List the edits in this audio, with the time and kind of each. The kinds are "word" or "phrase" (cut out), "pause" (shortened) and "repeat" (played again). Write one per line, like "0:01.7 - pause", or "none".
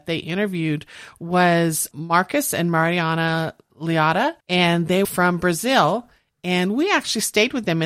0:01.9 - word
0:04.4 - pause
0:05.0 - word